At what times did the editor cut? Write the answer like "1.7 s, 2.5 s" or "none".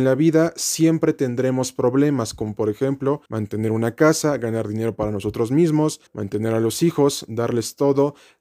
3.3 s, 6.1 s